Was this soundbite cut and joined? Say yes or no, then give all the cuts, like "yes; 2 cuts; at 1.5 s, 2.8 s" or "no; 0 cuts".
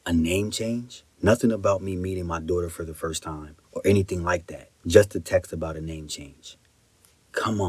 yes; 3 cuts; at 1.1 s, 3.6 s, 4.8 s